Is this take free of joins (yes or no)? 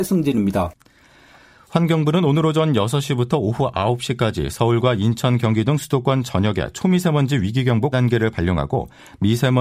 no